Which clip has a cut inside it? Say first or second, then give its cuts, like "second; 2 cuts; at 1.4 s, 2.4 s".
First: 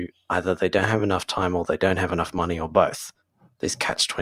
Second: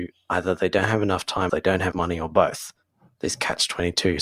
second; 2 cuts; at 1.5 s, 1.9 s